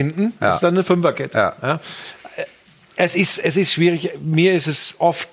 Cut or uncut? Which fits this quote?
uncut